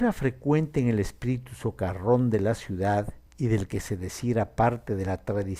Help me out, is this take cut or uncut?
cut